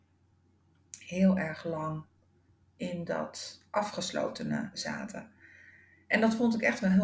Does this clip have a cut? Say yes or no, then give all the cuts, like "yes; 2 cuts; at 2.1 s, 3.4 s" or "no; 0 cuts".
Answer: no; 0 cuts